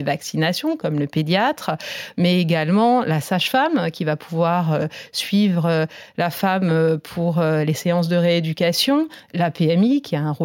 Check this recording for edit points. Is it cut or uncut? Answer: uncut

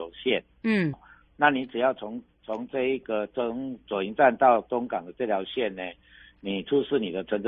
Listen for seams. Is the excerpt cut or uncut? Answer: cut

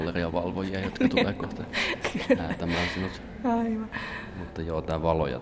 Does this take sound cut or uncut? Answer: uncut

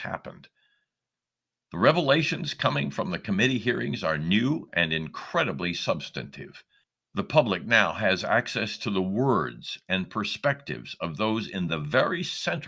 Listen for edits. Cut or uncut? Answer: cut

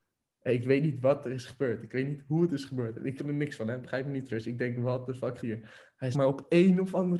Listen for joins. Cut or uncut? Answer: cut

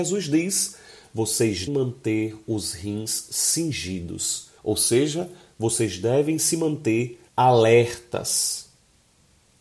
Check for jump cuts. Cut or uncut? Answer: cut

